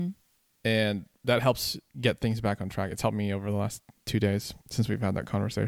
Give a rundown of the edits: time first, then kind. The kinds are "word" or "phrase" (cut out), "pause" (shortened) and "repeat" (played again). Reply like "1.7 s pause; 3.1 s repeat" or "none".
1.9 s pause; 4.6 s pause